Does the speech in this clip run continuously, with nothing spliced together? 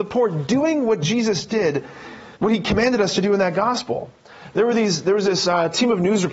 no; 1 cut; at 2.4 s

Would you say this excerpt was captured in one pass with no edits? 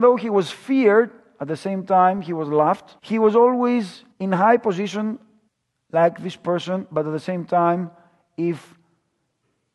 no; 3 cuts; at 3.0 s, 4.1 s, 5.5 s

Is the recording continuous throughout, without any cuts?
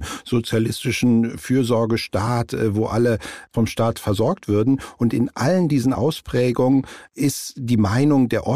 yes; 0 cuts

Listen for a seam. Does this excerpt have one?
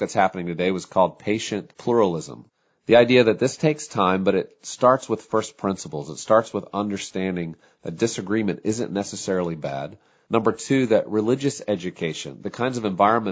no; 0 cuts

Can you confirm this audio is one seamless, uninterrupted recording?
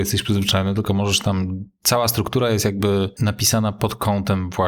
yes; 0 cuts

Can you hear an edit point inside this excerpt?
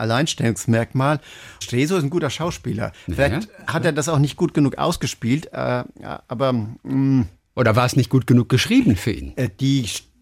yes; 1 cut; at 1.6 s

